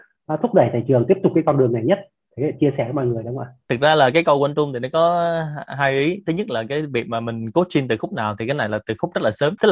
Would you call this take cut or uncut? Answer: uncut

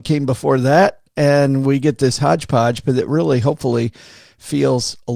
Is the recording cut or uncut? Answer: uncut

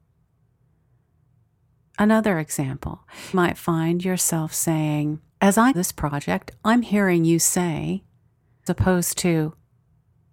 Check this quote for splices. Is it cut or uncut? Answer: cut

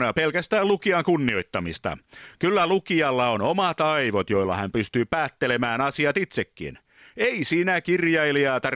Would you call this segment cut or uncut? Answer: uncut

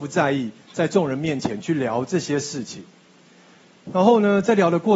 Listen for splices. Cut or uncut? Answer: uncut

